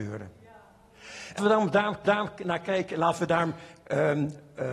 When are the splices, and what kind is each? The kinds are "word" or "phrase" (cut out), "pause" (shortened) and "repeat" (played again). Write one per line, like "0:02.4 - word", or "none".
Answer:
0:01.4 - word
0:02.0 - repeat